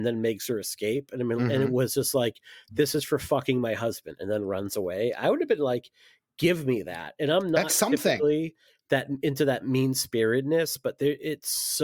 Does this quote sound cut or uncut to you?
uncut